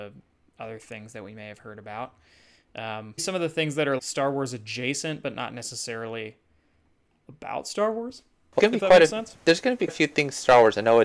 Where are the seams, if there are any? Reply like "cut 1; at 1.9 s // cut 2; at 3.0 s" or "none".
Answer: cut 1; at 3.2 s // cut 2; at 4.0 s // cut 3; at 8.6 s // cut 4; at 9.9 s